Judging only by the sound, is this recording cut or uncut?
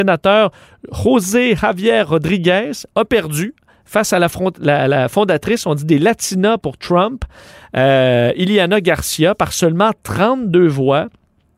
uncut